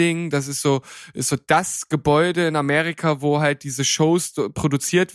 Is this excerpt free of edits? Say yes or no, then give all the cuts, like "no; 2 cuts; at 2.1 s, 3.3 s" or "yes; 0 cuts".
yes; 0 cuts